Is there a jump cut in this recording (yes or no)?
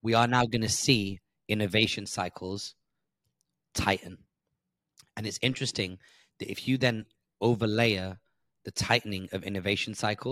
no